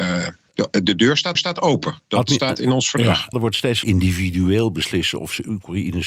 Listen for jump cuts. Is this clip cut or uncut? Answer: cut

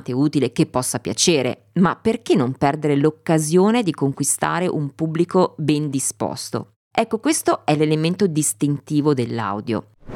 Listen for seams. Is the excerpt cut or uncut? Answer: uncut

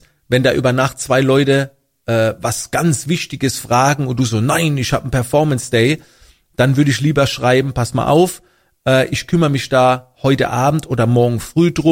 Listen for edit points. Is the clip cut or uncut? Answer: uncut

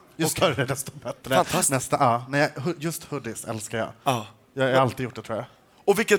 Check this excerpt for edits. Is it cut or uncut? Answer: uncut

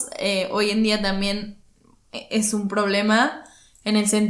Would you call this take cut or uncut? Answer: uncut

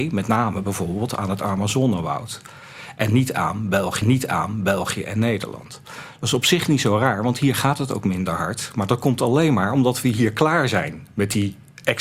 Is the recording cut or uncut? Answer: cut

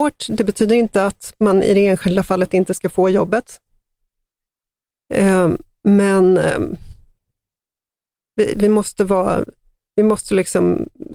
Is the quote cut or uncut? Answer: uncut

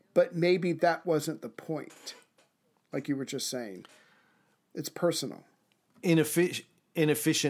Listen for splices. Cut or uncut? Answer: uncut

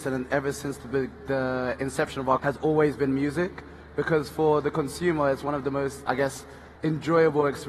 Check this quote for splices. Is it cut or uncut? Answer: cut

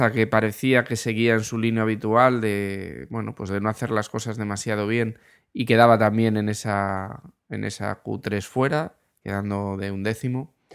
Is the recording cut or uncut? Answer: uncut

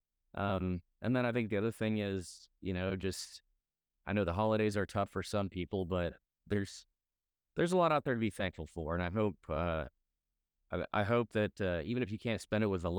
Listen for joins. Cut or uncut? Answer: uncut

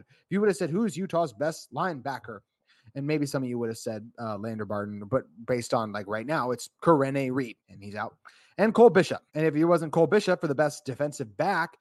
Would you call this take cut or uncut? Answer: cut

